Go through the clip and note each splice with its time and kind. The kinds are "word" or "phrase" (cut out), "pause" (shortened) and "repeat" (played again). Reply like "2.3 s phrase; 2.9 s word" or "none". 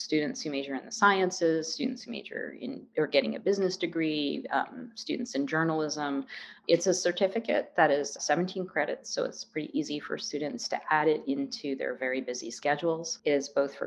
none